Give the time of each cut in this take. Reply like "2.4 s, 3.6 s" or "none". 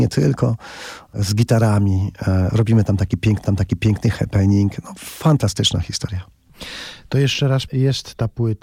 3.4 s, 7.7 s